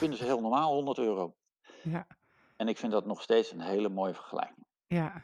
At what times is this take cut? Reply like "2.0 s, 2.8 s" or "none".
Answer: none